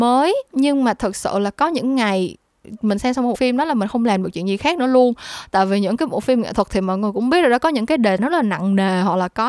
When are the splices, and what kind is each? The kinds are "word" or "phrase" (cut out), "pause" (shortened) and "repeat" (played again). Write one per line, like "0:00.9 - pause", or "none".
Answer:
0:03.3 - word
0:08.2 - word

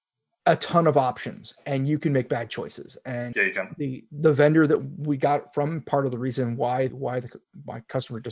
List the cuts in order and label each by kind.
0:03.3 - word
0:06.9 - word

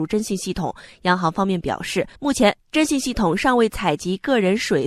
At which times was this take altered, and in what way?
0:02.2 - pause

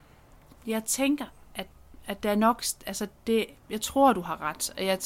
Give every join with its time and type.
none

